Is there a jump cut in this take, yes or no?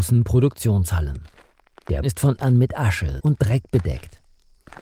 yes